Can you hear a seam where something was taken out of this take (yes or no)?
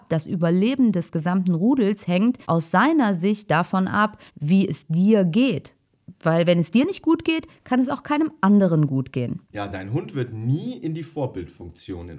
yes